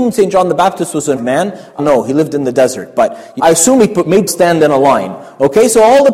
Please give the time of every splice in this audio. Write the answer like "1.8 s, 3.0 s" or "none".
1.2 s, 1.8 s, 3.4 s, 4.3 s